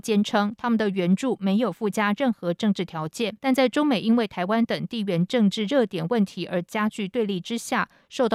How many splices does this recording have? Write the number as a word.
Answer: one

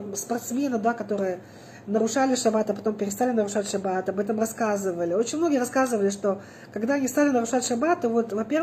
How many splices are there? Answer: zero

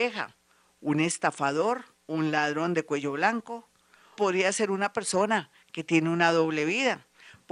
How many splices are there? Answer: two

